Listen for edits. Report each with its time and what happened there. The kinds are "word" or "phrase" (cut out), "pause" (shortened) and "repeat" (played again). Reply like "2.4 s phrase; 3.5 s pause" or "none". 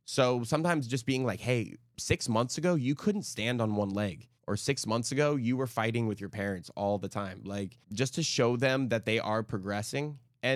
4.4 s pause; 7.8 s pause

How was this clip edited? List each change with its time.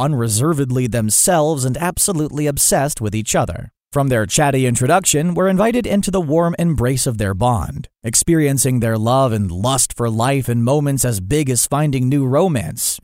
none

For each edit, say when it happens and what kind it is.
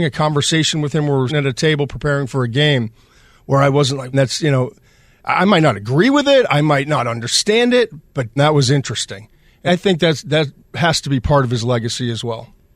1.3 s word; 4.1 s word; 8.4 s word; 9.7 s word

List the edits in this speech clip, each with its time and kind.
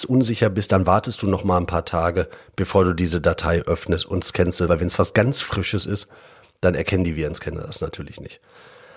4.7 s word

